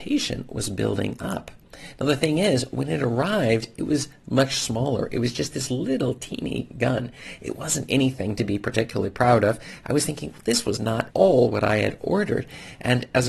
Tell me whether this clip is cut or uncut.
cut